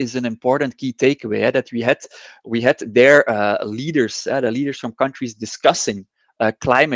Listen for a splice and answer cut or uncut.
uncut